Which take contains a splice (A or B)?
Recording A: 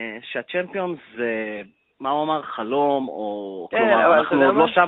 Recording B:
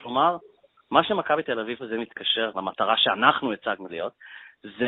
B